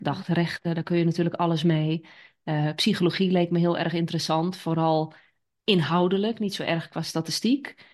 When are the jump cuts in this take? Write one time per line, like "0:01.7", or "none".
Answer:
none